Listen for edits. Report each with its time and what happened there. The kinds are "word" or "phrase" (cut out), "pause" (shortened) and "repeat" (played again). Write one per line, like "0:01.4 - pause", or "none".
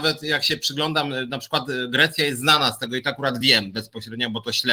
none

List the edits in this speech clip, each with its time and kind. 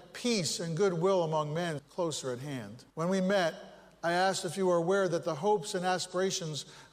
0:01.8 - word
0:02.9 - pause

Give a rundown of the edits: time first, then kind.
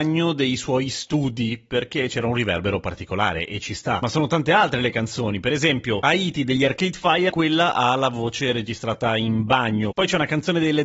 0:07.3 - word

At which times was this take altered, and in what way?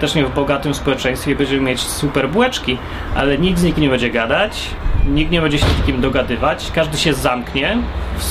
none

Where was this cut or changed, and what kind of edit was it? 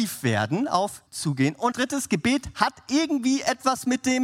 0:01.1 - word
0:01.7 - word

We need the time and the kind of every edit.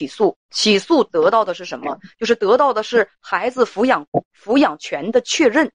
none

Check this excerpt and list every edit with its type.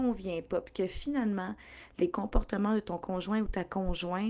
none

